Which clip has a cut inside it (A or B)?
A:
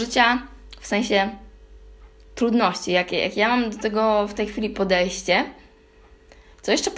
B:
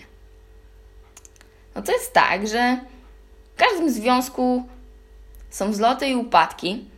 B